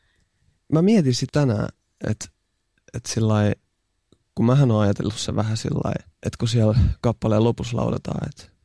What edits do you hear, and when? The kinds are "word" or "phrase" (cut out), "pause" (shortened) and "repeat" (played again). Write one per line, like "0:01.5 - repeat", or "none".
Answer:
0:01.3 - word